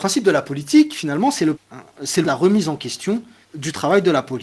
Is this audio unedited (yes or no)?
no